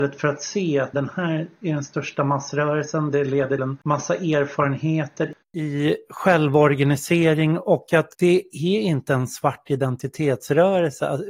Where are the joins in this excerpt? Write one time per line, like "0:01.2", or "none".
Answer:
0:00.9
0:03.6
0:05.4
0:08.1